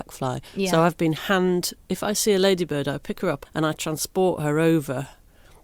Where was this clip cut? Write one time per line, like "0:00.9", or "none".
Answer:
0:03.4